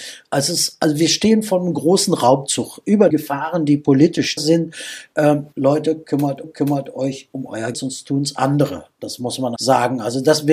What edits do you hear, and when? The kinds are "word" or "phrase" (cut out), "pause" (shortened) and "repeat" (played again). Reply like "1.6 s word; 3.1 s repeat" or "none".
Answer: 3.1 s phrase; 4.4 s word; 5.5 s pause; 6.4 s repeat; 7.7 s word; 9.6 s word